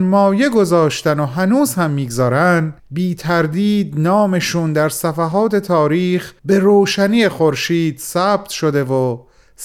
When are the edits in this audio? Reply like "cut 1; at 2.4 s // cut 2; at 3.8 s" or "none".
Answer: cut 1; at 2.8 s // cut 2; at 6.4 s

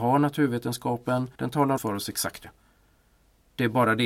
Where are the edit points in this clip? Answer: cut 1; at 1.3 s // cut 2; at 1.8 s // cut 3; at 2.4 s

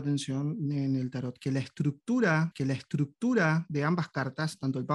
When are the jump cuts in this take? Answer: cut 1; at 2.5 s

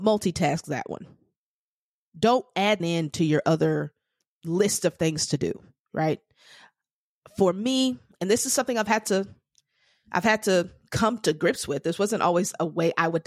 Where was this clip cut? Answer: cut 1; at 2.8 s // cut 2; at 4.2 s

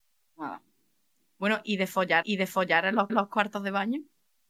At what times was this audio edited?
cut 1; at 2.2 s // cut 2; at 3.1 s

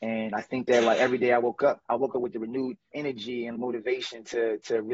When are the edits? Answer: cut 1; at 1.8 s // cut 2; at 2.9 s // cut 3; at 3.5 s

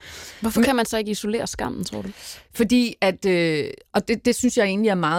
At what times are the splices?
none

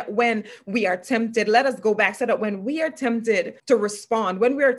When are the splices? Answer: cut 1; at 3.6 s

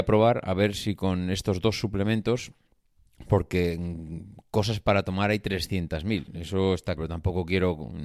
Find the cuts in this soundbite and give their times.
cut 1; at 7.0 s

